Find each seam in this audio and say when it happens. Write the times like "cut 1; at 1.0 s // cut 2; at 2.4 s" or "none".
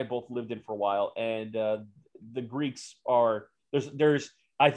none